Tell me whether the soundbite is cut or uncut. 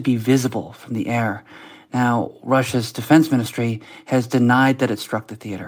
uncut